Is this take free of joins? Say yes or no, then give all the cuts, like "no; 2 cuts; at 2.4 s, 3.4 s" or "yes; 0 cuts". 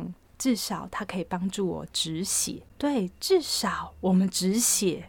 no; 1 cut; at 2.7 s